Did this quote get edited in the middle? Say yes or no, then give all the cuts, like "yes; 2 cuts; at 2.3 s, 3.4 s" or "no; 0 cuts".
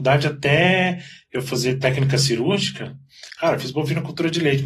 no; 0 cuts